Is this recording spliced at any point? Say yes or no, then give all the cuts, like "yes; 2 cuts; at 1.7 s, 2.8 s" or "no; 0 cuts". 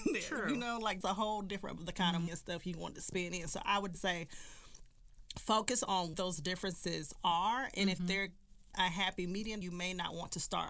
yes; 7 cuts; at 1.0 s, 1.8 s, 2.3 s, 3.9 s, 6.1 s, 8.7 s, 9.6 s